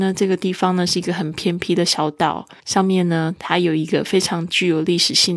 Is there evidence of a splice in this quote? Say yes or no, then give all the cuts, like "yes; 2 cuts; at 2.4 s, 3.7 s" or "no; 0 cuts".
yes; 1 cut; at 2.6 s